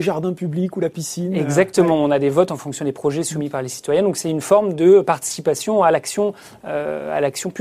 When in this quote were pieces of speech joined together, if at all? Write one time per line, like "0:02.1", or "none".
none